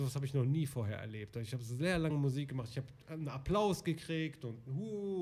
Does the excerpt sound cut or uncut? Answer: uncut